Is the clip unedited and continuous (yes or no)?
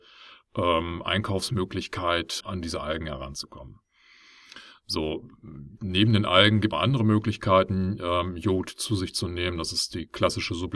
no